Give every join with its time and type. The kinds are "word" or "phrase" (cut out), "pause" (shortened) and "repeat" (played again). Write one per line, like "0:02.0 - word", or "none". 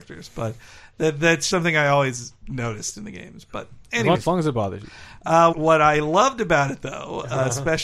0:01.5 - word
0:04.1 - word
0:05.5 - word